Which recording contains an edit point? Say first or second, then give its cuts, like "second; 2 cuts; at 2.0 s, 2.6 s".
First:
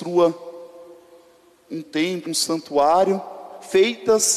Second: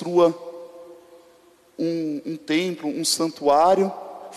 first; 2 cuts; at 1.7 s, 2.3 s